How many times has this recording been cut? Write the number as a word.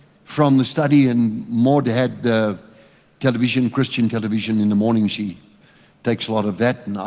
zero